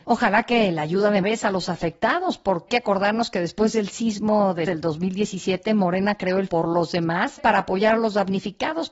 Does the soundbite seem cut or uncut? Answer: cut